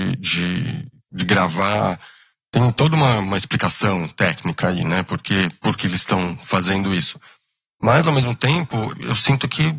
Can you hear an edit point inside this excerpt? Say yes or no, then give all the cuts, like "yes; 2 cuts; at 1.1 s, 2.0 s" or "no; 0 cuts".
yes; 1 cut; at 5.8 s